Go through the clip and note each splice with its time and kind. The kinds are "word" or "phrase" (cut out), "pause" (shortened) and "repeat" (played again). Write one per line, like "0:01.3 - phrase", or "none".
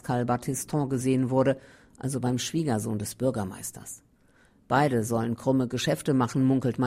none

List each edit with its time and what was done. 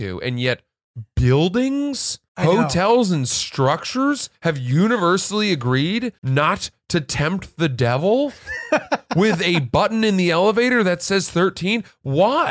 0:02.3 - pause
0:04.3 - pause
0:06.2 - pause

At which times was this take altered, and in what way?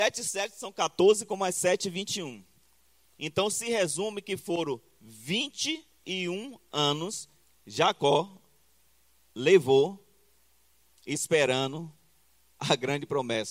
0:07.5 - word

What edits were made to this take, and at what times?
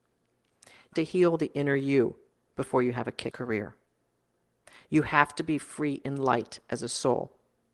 0:00.9 - word
0:02.3 - pause
0:03.3 - word

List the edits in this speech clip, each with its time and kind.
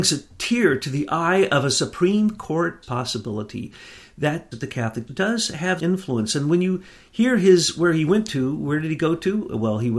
0:02.8 - word
0:04.5 - word
0:05.1 - word
0:05.8 - word

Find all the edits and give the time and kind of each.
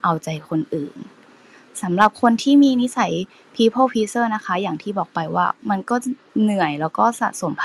none

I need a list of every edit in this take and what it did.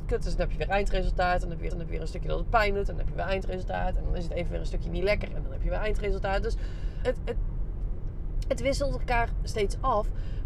0:01.7 - repeat
0:07.0 - word

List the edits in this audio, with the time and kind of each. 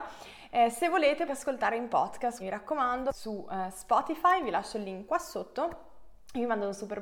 0:01.3 - phrase
0:02.4 - word

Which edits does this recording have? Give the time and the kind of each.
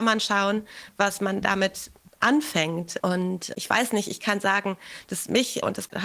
none

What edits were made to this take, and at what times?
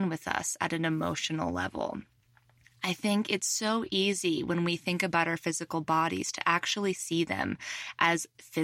none

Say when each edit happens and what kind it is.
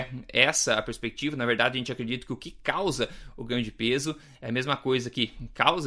none

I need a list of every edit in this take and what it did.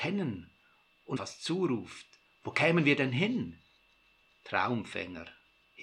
0:01.2 - word

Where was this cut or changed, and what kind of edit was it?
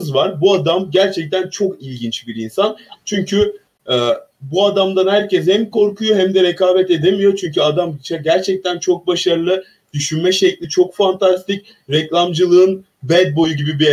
none

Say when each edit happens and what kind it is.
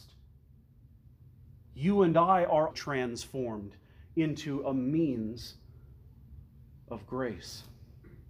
0:02.7 - word

